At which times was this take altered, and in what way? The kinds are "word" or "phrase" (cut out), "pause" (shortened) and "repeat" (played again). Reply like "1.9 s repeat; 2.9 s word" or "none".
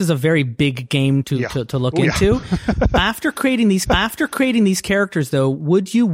1.2 s word; 3.9 s repeat